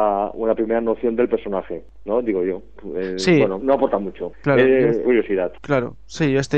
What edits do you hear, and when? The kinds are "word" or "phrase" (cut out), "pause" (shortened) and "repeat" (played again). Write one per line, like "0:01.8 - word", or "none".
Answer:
0:03.6 - word
0:05.0 - word